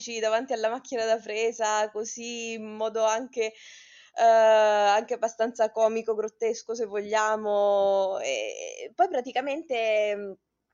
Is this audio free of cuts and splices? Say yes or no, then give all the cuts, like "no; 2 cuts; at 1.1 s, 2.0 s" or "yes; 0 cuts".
yes; 0 cuts